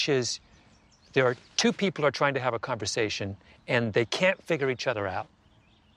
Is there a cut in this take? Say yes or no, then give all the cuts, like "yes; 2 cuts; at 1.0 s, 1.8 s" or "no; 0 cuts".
no; 0 cuts